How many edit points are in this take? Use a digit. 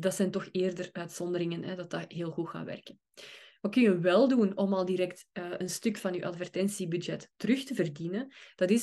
0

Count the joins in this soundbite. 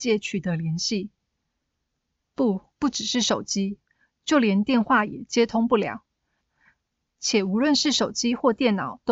1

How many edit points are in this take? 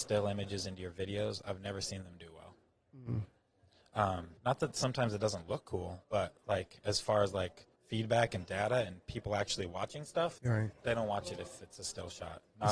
4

